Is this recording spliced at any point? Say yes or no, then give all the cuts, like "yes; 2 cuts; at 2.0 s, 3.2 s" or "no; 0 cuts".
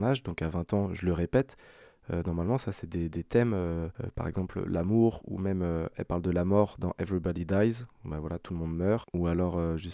no; 0 cuts